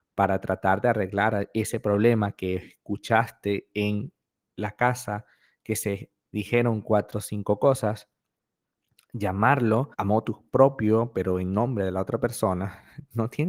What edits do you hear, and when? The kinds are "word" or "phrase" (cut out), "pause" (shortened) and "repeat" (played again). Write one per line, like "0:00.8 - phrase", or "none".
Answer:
0:09.9 - pause